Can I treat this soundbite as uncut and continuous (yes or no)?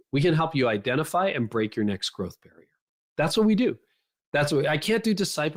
yes